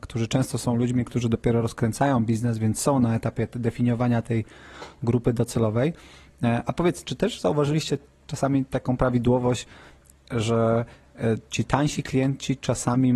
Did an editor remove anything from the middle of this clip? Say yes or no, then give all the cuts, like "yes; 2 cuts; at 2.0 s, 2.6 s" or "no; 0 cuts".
no; 0 cuts